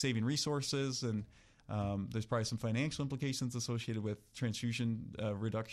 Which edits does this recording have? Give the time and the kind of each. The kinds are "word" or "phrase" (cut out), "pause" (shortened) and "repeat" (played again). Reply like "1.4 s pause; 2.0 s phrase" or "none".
none